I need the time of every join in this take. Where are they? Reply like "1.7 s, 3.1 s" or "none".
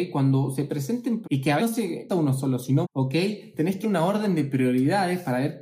1.2 s, 1.6 s, 2.1 s, 2.8 s, 3.8 s